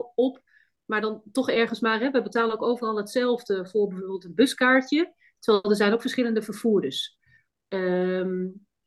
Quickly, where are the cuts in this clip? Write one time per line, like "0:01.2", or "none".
none

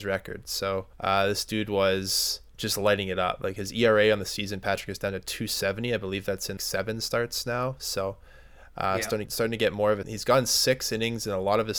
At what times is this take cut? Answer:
0:00.9
0:02.5
0:06.6
0:09.3
0:10.0

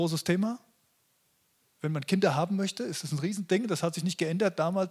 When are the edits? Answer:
none

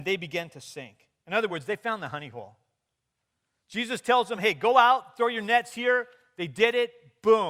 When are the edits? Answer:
none

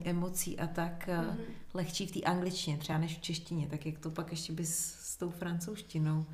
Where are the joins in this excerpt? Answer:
none

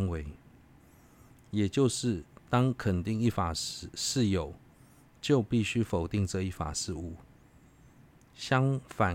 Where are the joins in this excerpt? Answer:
none

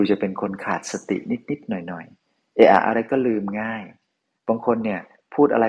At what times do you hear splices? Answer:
none

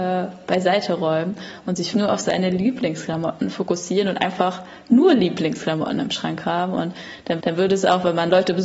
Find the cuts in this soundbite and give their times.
0:01.9
0:07.4

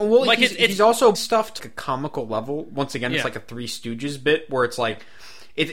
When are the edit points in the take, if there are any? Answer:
0:01.1
0:01.6

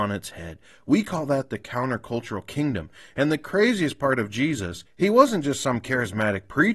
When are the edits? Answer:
0:04.9

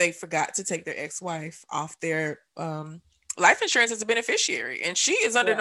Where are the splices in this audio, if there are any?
none

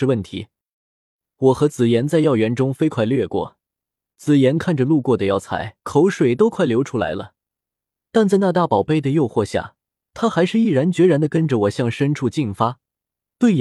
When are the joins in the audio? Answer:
0:05.8

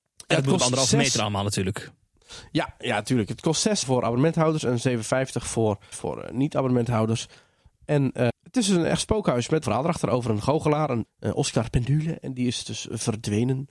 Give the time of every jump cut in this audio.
0:03.8
0:05.9
0:08.3
0:09.6
0:11.1

